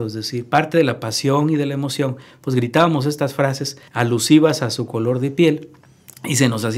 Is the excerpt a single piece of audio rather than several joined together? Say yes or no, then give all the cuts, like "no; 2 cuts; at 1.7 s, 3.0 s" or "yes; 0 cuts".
no; 1 cut; at 3.9 s